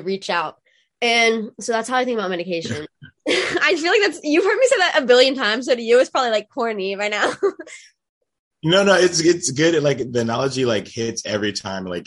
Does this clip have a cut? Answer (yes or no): no